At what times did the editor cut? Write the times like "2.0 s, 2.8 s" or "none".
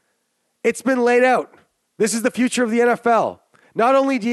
none

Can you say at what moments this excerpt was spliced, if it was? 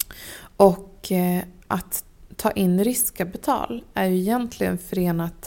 none

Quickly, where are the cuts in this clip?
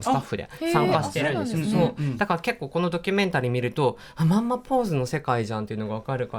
none

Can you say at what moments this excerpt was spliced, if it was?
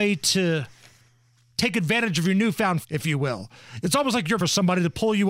2.8 s, 4.4 s

